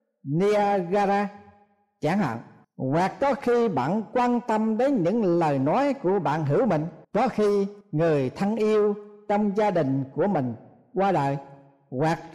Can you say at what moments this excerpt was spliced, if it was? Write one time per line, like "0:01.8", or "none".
0:02.6
0:07.0
0:07.8